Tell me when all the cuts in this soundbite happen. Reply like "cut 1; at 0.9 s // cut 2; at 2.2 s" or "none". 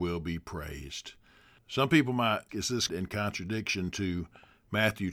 cut 1; at 2.5 s // cut 2; at 2.9 s